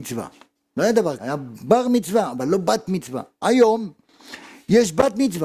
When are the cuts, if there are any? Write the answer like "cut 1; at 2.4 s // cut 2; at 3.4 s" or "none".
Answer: cut 1; at 1.2 s